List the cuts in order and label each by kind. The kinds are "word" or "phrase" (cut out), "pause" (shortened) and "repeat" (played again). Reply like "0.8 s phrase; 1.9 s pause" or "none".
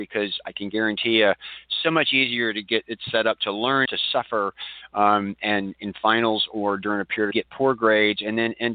3.8 s phrase; 7.3 s phrase